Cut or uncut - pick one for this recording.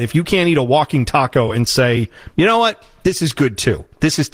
uncut